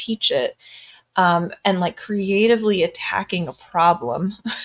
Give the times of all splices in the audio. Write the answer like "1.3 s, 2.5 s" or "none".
none